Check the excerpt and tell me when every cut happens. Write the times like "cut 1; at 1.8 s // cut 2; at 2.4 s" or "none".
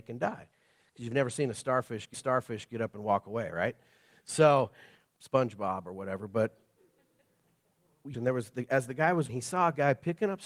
cut 1; at 2.1 s // cut 2; at 5.1 s // cut 3; at 8.1 s // cut 4; at 9.3 s